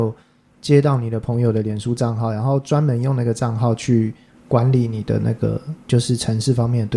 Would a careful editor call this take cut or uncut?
uncut